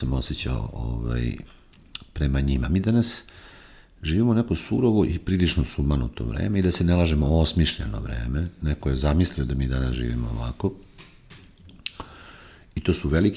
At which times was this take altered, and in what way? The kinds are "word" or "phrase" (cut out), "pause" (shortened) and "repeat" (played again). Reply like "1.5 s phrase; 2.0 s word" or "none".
none